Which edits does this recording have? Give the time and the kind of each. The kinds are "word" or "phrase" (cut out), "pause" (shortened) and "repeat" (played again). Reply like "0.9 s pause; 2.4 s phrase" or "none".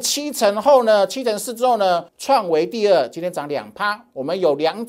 2.1 s pause